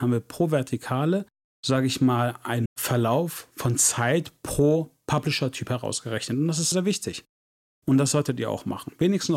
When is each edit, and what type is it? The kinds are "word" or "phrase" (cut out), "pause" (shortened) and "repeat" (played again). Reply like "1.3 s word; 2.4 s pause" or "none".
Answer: 2.7 s word; 6.7 s word